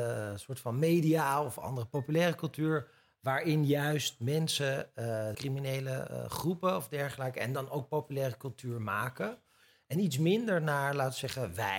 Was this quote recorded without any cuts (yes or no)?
no